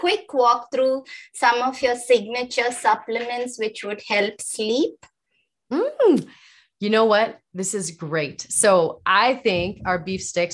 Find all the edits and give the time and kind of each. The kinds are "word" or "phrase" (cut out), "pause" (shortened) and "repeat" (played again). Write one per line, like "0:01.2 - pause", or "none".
none

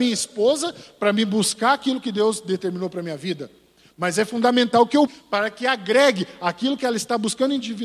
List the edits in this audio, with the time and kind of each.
0:05.1 - word

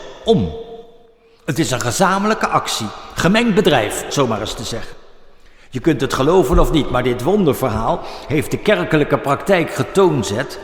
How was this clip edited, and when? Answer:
0:04.1 - word

